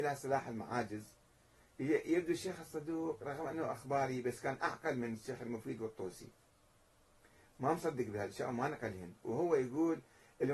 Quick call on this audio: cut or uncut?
uncut